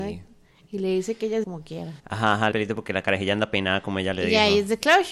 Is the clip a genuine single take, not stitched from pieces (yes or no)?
no